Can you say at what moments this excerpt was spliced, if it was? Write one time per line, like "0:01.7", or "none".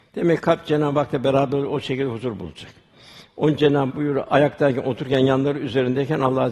0:03.9